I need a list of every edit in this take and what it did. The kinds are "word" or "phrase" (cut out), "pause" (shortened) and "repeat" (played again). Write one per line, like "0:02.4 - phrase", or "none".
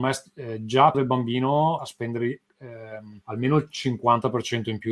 0:00.9 - word
0:01.8 - phrase
0:03.2 - pause